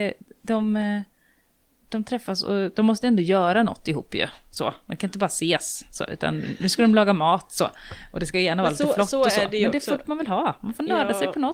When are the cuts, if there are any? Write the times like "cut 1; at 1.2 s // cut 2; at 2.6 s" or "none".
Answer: none